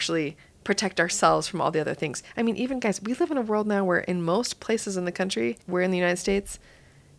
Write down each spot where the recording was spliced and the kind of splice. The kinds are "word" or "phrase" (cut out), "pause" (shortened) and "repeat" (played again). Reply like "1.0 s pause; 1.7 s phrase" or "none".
5.6 s pause

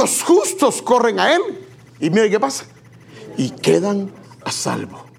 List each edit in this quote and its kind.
none

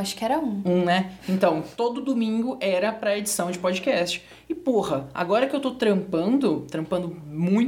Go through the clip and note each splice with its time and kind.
none

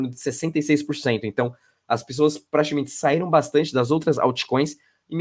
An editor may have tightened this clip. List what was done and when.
none

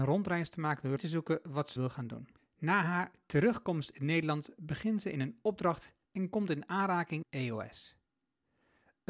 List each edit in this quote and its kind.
1.0 s phrase; 1.8 s word; 2.4 s pause; 7.2 s word

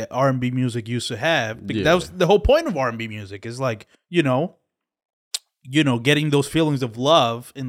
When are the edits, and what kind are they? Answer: 3.9 s pause

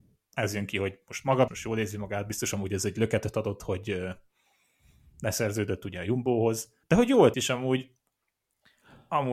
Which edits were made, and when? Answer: 1.5 s word; 6.8 s pause; 7.3 s word

